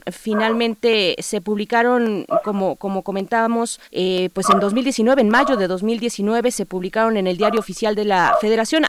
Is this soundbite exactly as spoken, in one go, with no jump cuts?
no; 1 cut; at 3.8 s

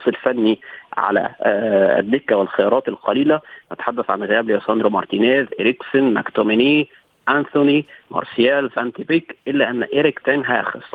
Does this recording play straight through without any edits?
yes; 0 cuts

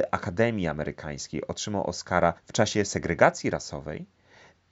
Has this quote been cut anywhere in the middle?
yes; 1 cut; at 2.4 s

